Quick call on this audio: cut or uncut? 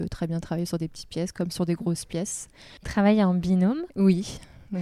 cut